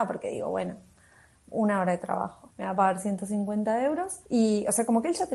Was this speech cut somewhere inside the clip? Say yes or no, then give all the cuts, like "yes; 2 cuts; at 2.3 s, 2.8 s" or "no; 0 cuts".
yes; 2 cuts; at 2.5 s, 4.3 s